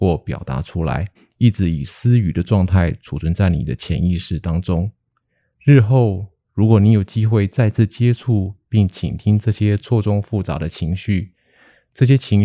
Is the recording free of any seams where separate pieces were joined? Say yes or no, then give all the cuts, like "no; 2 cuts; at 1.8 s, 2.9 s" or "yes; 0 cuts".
no; 1 cut; at 1.1 s